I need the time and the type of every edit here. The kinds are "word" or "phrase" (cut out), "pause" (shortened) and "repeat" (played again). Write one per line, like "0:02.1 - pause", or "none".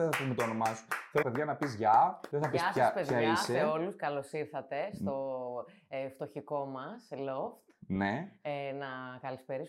0:01.2 - phrase